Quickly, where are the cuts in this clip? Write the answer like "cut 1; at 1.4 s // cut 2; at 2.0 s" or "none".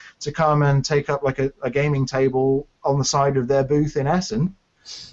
none